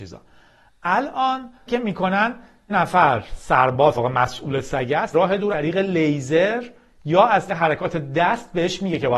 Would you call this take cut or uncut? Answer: cut